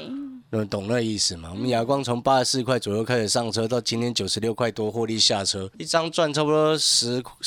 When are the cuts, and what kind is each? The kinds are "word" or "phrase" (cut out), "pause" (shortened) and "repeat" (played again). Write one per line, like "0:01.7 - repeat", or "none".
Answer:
0:05.7 - word